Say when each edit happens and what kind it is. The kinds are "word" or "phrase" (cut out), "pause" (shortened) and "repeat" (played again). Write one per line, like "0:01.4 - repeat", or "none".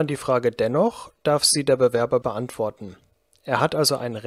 0:02.2 - phrase